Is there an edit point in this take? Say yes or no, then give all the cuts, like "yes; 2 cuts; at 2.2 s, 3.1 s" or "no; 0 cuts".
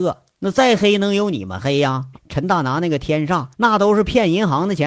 yes; 2 cuts; at 2.1 s, 3.5 s